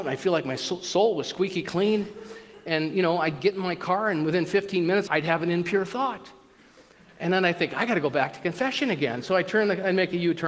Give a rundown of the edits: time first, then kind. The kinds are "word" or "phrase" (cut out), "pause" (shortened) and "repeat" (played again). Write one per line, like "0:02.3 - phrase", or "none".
0:05.1 - word